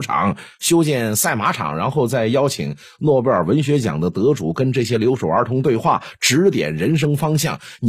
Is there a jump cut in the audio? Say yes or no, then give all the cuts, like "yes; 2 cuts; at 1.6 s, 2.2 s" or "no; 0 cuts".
no; 0 cuts